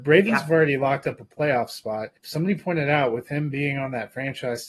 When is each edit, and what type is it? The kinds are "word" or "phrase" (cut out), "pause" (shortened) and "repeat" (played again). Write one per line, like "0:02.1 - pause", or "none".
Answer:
0:02.2 - pause